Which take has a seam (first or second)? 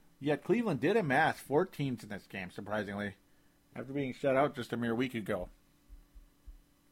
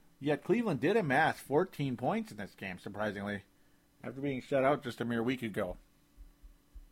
first